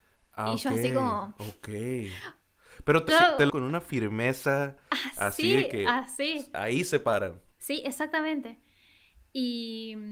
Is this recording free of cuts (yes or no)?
no